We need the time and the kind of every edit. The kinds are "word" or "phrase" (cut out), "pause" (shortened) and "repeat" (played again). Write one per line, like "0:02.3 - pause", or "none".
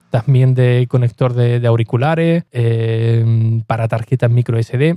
0:02.5 - pause